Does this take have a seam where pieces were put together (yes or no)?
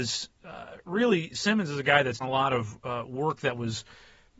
yes